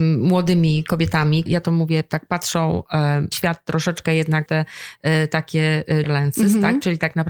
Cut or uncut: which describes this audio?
cut